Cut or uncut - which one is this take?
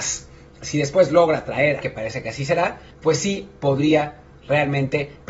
cut